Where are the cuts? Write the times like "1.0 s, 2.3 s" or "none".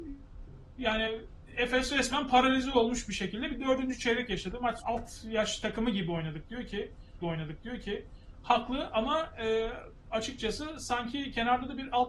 4.8 s, 7.2 s